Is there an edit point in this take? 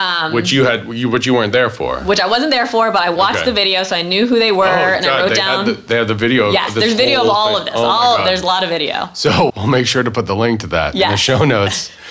yes; 1 cut; at 9.5 s

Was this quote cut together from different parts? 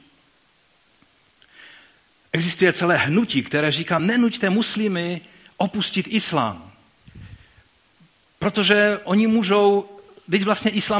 no; 0 cuts

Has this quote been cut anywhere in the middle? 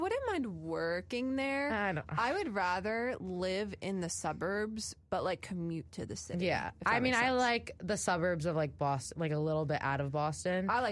no; 0 cuts

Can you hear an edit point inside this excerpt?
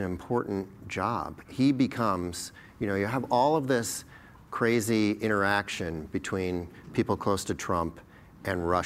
no; 0 cuts

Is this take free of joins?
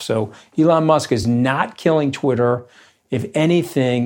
yes; 0 cuts

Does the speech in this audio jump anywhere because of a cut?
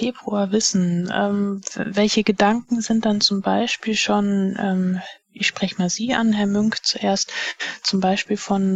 no; 0 cuts

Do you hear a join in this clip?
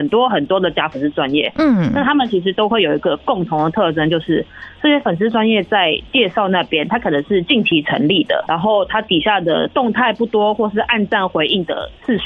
yes; 1 cut; at 8.5 s

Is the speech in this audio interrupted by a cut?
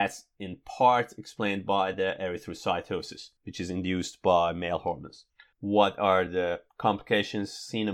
no; 0 cuts

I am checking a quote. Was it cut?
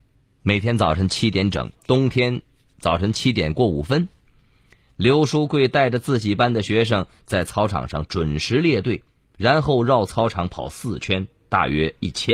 yes; 1 cut; at 1.8 s

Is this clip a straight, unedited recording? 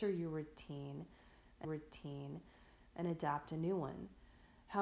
no; 1 cut; at 1.6 s

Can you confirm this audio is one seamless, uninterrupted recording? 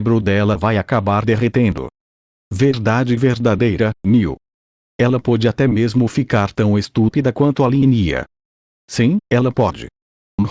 yes; 0 cuts

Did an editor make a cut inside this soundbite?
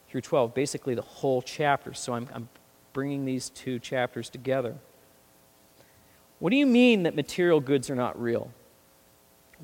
no; 0 cuts

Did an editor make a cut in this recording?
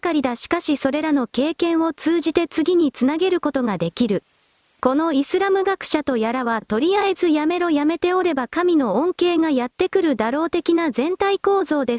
yes; 1 cut; at 4.6 s

